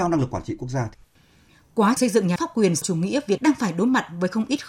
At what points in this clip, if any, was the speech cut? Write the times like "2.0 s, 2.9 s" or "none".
2.0 s, 2.4 s, 2.8 s, 3.4 s